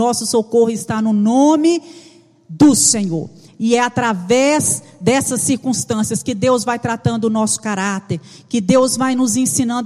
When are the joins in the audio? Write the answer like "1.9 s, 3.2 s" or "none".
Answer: none

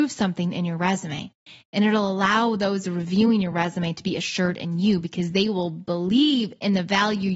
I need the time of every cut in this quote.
none

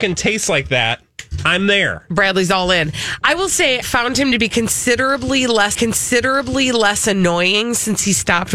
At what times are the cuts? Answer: 3.8 s, 5.7 s

